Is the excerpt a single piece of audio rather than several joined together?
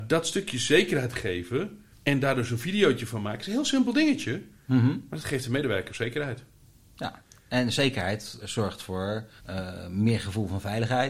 no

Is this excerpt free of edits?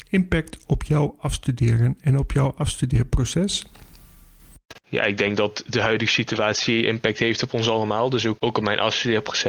no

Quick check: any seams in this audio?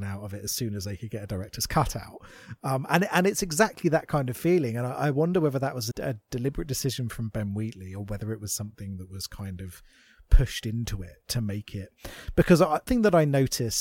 yes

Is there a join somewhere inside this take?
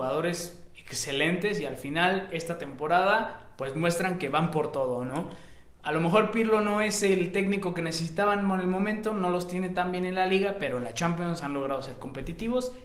no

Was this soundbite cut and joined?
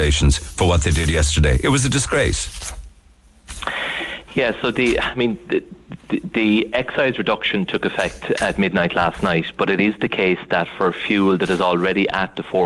no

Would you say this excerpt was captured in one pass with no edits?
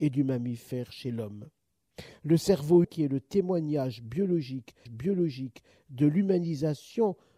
no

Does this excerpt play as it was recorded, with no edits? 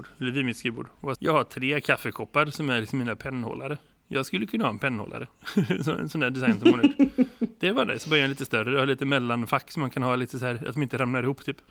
no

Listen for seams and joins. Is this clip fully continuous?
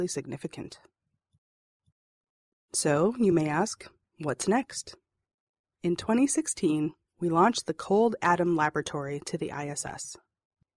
yes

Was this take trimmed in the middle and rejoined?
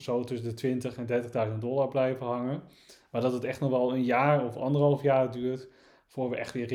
no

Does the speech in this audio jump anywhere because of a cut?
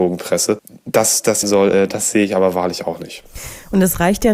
yes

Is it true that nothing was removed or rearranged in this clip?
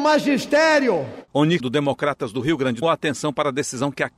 no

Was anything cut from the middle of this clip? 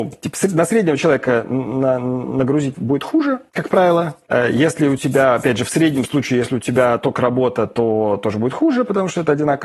yes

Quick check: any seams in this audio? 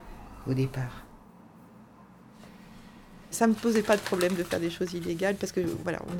no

